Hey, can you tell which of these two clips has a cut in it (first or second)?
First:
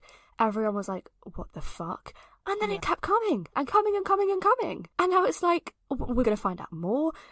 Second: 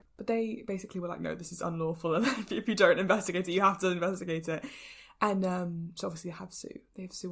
first